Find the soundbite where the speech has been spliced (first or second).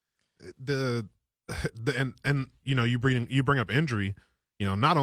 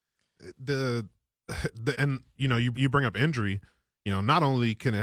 second